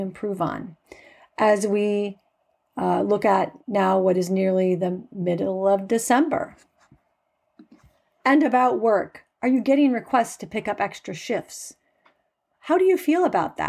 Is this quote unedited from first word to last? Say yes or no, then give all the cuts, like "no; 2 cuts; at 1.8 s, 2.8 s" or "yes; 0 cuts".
no; 1 cut; at 3.6 s